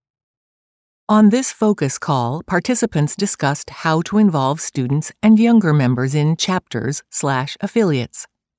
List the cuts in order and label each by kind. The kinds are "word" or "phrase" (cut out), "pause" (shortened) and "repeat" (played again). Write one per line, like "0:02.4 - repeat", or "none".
none